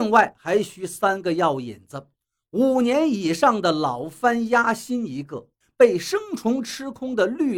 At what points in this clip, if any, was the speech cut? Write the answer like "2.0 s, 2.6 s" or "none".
2.2 s, 5.6 s